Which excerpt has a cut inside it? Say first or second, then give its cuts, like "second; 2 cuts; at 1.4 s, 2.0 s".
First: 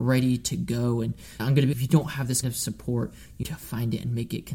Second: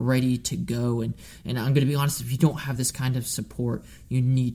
first; 4 cuts; at 1.4 s, 1.7 s, 2.4 s, 3.4 s